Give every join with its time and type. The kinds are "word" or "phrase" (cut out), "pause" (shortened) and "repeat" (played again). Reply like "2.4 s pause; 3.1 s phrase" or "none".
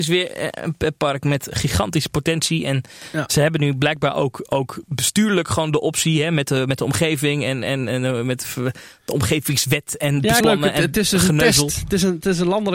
10.4 s phrase